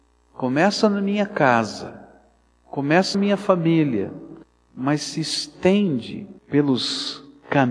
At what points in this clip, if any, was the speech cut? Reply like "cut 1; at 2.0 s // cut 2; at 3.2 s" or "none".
cut 1; at 3.1 s // cut 2; at 4.4 s // cut 3; at 6.4 s